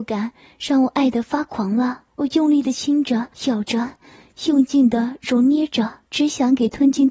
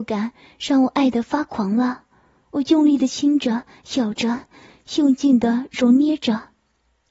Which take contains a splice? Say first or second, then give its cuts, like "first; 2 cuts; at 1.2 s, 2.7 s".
first; 3 cuts; at 2.1 s, 3.3 s, 6.1 s